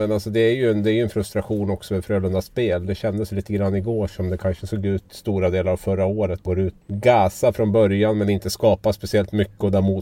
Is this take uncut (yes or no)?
no